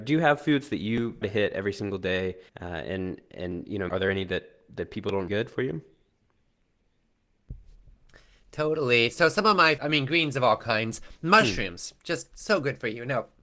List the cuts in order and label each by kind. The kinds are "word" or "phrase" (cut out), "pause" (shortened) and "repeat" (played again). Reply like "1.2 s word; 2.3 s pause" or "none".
1.2 s word; 2.5 s pause; 3.9 s word; 5.3 s phrase; 9.8 s word

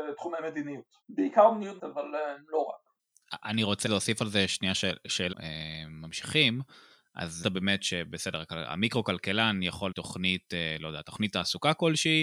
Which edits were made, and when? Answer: 1.0 s pause; 1.8 s word; 3.9 s word; 5.3 s phrase; 7.4 s phrase; 9.9 s phrase

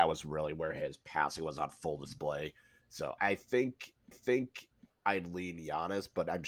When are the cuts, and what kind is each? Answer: 3.2 s word; 4.1 s repeat

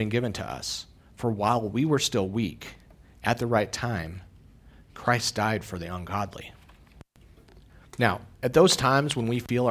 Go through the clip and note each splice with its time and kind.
none

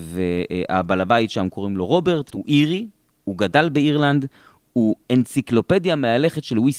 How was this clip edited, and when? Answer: 2.3 s word

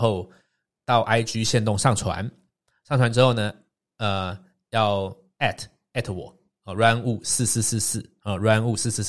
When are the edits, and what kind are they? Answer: none

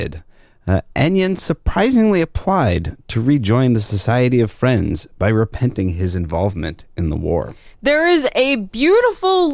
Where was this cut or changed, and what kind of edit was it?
none

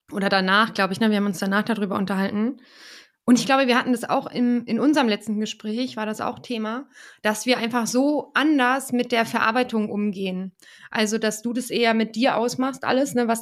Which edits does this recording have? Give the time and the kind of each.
none

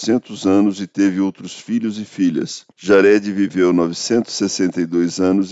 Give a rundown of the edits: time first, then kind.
2.7 s pause

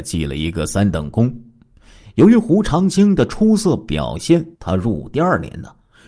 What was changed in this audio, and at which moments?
4.6 s pause

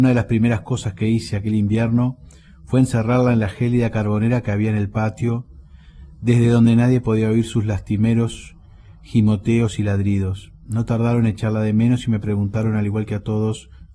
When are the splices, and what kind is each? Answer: none

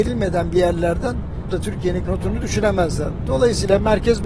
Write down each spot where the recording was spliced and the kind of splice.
1.5 s word; 2.1 s word

